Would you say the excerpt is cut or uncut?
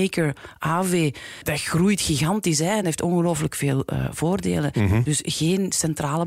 uncut